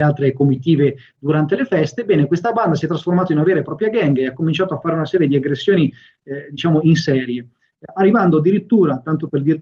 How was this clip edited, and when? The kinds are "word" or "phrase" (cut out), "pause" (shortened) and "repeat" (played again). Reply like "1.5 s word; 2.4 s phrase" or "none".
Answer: none